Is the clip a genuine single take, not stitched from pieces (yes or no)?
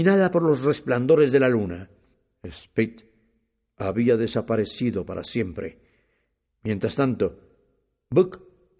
yes